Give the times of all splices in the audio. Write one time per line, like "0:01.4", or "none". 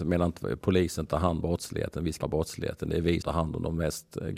0:01.4
0:02.2
0:03.2

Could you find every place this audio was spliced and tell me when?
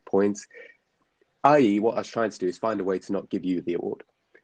none

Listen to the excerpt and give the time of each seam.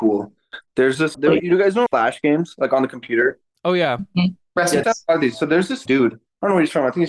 0:01.1
0:01.9
0:04.8
0:05.9

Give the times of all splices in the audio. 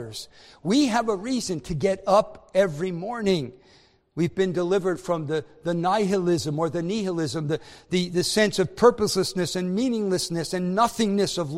none

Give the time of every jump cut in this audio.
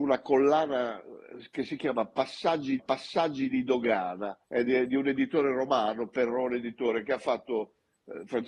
0:02.8
0:04.4

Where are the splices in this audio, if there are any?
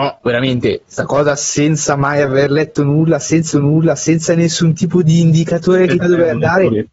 0:03.5
0:06.0

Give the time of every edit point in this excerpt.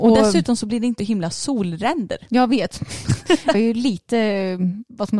0:01.0
0:01.3
0:03.5

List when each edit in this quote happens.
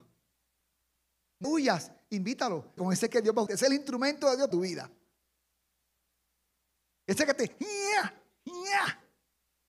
0:01.4
0:02.8
0:03.5
0:04.5

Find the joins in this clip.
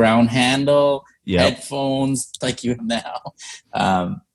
0:02.4
0:02.8

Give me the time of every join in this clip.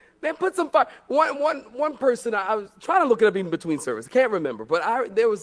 none

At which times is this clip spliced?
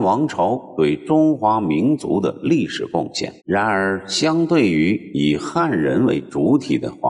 0:03.4

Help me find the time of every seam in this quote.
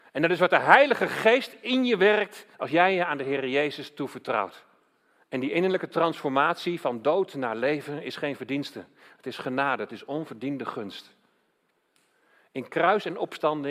0:02.5
0:05.0

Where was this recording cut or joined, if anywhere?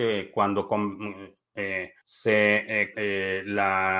0:02.0
0:02.9

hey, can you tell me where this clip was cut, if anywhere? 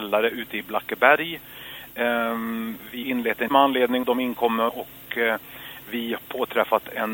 0:03.0
0:03.5
0:04.0
0:04.7
0:06.2

